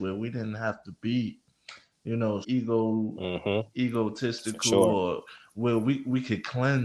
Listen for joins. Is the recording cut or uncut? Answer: cut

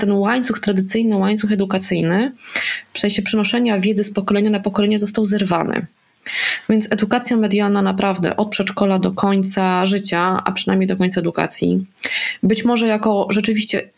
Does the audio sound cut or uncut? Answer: uncut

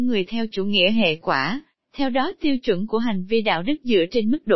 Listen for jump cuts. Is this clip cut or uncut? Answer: uncut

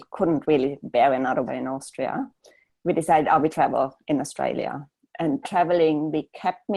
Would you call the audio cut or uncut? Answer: cut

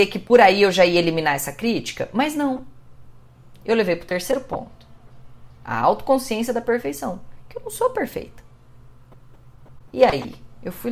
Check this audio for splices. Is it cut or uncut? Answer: uncut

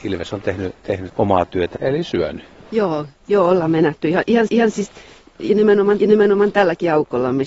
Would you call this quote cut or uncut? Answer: cut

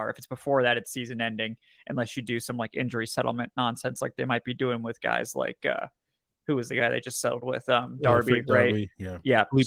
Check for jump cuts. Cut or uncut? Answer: uncut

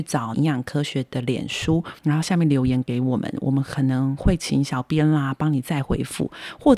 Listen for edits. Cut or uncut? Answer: cut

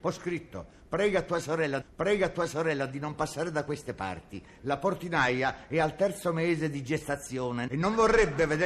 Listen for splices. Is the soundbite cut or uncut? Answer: cut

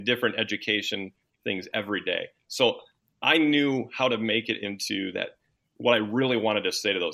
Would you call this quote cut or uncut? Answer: uncut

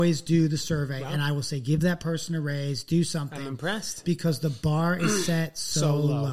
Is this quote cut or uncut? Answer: uncut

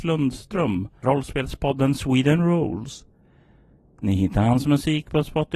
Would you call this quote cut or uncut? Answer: cut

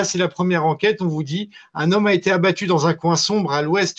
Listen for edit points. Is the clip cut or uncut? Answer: uncut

